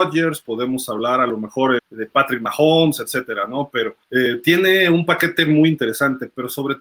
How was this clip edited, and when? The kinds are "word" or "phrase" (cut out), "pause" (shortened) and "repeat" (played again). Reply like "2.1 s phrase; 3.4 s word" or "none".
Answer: 1.8 s word; 4.0 s pause